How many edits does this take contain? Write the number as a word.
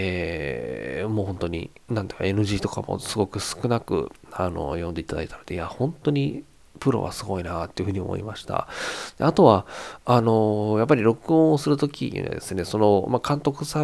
one